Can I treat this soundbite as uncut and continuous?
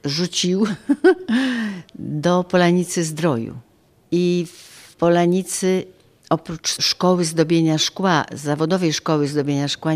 yes; 0 cuts

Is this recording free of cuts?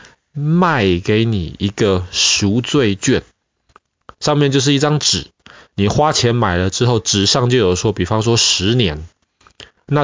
yes; 0 cuts

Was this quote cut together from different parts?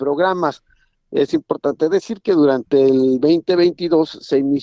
no; 0 cuts

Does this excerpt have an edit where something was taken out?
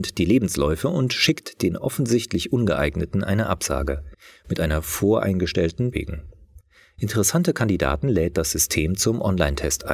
yes; 1 cut; at 5.9 s

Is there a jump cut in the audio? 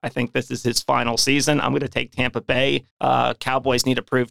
yes; 1 cut; at 2.9 s

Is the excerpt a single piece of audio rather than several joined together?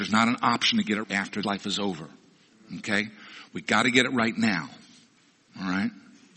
no; 2 cuts; at 1.0 s, 1.4 s

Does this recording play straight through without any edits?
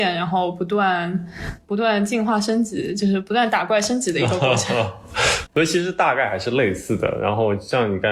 no; 1 cut; at 5.5 s

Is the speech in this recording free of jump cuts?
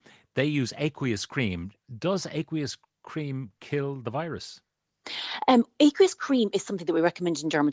yes; 0 cuts

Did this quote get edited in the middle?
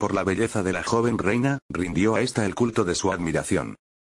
no; 0 cuts

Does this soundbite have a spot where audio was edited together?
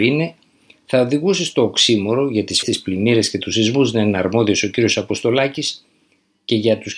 yes; 1 cut; at 2.6 s

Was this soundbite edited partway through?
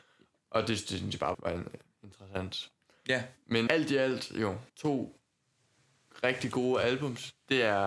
yes; 4 cuts; at 1.3 s, 1.9 s, 3.7 s, 4.7 s

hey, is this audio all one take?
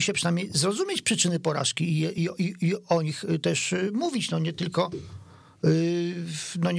yes; 0 cuts

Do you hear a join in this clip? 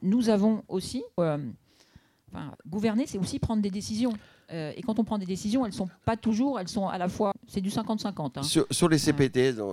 yes; 3 cuts; at 1.2 s, 2.5 s, 7.3 s

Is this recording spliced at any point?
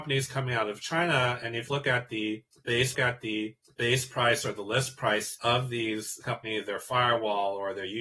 yes; 3 cuts; at 1.7 s, 2.9 s, 6.2 s

